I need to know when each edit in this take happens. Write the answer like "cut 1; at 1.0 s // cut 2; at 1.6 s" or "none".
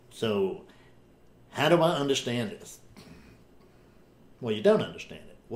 none